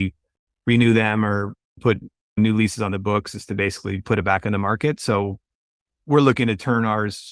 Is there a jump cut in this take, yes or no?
no